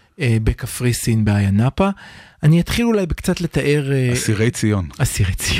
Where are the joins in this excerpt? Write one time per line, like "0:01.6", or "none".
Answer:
none